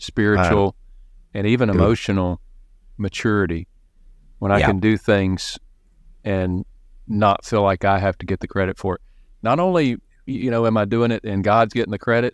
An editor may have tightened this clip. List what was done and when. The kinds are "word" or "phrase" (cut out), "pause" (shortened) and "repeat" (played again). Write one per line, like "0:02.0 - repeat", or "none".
none